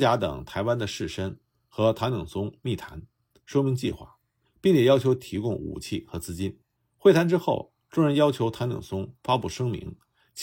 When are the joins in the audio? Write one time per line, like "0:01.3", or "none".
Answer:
0:06.8

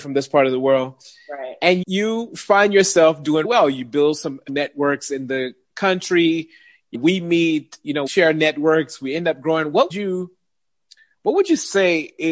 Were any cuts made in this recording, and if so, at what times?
0:01.8
0:03.4
0:04.5
0:06.9
0:08.1
0:09.9

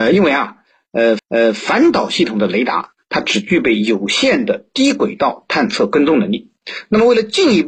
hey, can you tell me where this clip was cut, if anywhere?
0:01.2

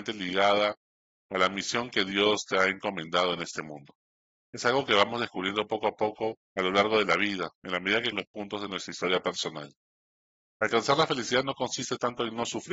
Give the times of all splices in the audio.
0:06.4
0:08.1

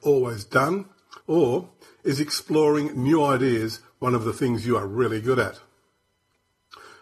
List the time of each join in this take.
0:01.2

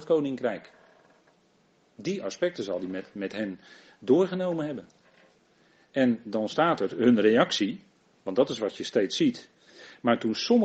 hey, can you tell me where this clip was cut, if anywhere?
none

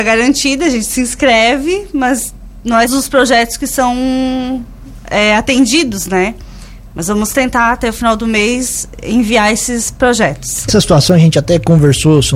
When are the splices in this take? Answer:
0:02.9
0:10.7

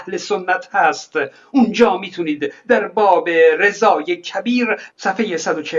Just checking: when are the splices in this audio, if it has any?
none

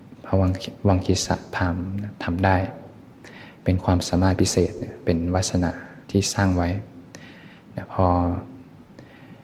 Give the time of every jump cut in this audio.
0:06.0

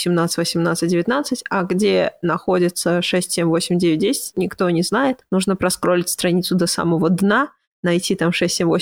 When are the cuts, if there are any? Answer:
0:04.3

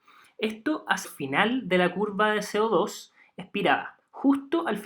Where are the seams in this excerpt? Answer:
0:01.0

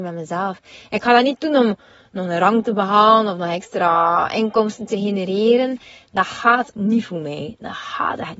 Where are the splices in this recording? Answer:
0:06.7

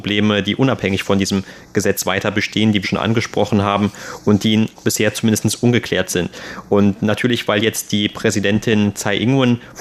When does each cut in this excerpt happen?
0:02.8
0:04.7

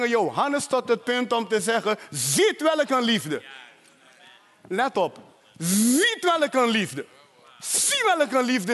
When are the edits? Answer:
none

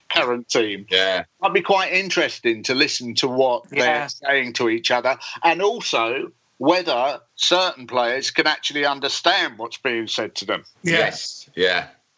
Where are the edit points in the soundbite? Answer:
0:07.3
0:10.7

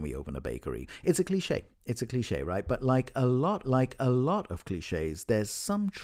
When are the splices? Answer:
0:01.7
0:03.6

